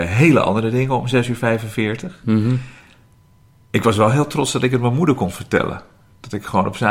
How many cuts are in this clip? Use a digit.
0